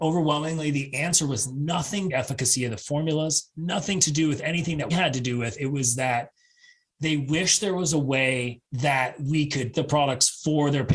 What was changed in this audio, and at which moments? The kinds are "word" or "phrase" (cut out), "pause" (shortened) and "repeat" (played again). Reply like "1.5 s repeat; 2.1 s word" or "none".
2.1 s phrase; 4.9 s word; 8.7 s pause; 9.7 s word

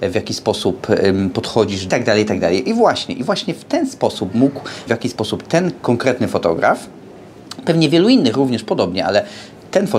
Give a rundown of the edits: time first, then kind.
1.9 s phrase; 4.3 s word; 4.9 s word

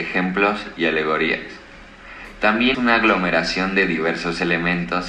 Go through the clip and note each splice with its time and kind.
2.7 s word

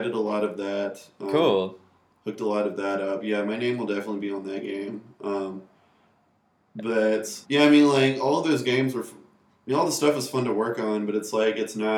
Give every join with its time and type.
7.4 s pause

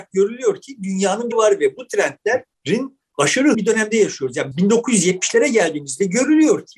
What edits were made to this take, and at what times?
1.3 s phrase; 3.5 s word; 4.5 s word

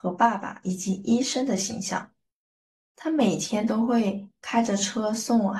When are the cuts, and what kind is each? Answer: none

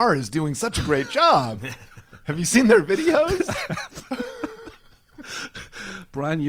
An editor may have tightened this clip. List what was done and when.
none

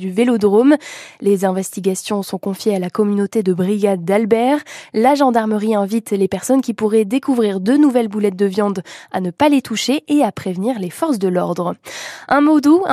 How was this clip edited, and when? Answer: none

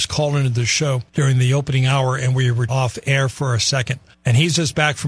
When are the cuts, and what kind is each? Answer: 1.1 s pause; 2.7 s word; 4.1 s pause

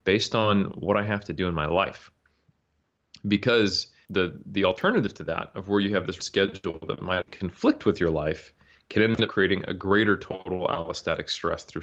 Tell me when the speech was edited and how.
4.0 s word; 6.2 s word; 7.2 s word

